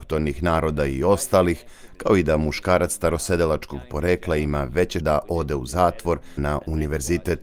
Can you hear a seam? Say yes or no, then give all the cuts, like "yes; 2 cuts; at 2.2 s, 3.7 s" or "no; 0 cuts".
yes; 2 cuts; at 5.0 s, 6.4 s